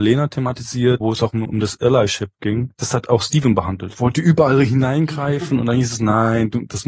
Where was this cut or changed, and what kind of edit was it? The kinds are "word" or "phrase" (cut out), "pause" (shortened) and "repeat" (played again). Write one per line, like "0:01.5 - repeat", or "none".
0:01.0 - word
0:01.5 - word